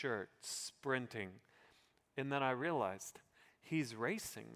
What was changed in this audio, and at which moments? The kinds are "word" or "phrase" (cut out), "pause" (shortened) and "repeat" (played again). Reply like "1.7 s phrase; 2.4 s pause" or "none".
none